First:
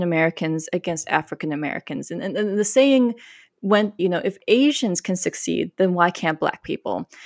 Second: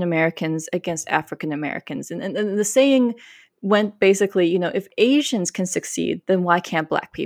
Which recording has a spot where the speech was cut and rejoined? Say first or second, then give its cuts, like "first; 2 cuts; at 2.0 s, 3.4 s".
first; 1 cut; at 4.0 s